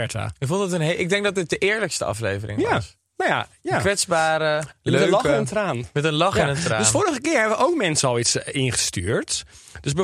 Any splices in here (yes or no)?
no